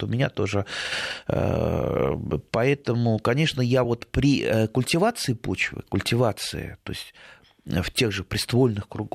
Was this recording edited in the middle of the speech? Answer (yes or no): no